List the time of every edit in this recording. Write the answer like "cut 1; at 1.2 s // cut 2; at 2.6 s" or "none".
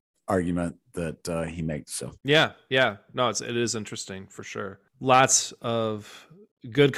cut 1; at 2.2 s // cut 2; at 4.9 s